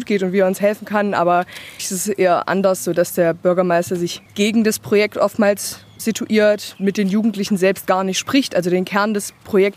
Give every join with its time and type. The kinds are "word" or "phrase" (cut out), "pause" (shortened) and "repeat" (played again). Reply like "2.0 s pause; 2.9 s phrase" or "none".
1.8 s word; 4.3 s pause; 6.0 s word